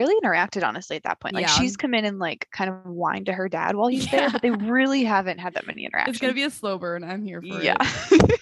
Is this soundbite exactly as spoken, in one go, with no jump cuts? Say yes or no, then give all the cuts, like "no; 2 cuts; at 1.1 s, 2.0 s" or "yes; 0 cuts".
yes; 0 cuts